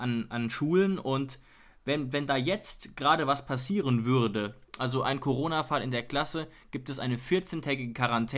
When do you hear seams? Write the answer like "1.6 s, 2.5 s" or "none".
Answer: none